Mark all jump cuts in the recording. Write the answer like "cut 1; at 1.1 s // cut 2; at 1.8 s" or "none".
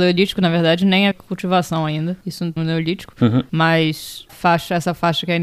cut 1; at 1.1 s // cut 2; at 2.6 s // cut 3; at 4.3 s